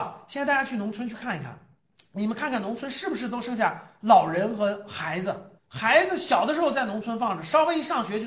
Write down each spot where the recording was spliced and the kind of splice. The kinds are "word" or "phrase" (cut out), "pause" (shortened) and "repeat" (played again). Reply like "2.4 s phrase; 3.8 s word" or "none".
none